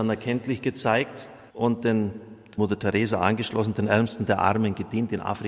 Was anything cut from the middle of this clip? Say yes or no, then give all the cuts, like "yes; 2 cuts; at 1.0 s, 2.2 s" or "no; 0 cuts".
yes; 2 cuts; at 1.5 s, 2.6 s